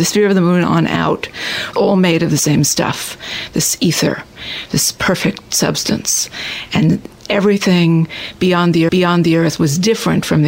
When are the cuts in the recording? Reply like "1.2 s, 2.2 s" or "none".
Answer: 1.7 s, 8.9 s